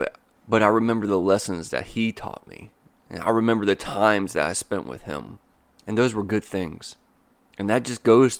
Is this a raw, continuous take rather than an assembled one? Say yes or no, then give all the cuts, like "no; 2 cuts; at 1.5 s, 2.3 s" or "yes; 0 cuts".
yes; 0 cuts